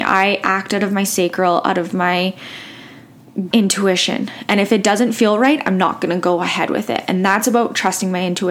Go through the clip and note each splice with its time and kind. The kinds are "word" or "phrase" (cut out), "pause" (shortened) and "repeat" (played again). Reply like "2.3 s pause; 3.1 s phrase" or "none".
3.5 s word